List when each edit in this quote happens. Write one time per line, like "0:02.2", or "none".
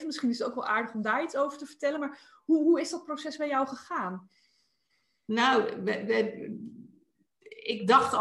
none